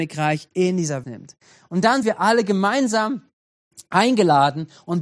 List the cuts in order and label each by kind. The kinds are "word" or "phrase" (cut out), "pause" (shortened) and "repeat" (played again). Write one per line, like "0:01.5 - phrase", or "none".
0:01.0 - phrase
0:02.0 - word